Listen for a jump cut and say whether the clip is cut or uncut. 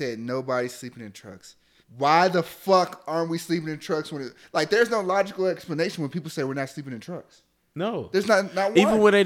cut